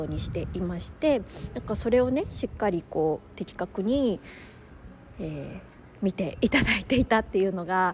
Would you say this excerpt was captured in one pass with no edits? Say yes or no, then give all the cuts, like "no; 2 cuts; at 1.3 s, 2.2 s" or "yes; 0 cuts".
yes; 0 cuts